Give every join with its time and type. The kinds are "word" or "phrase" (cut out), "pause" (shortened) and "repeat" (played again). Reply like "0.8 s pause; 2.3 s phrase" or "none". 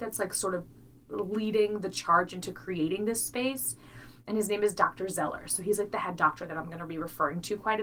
none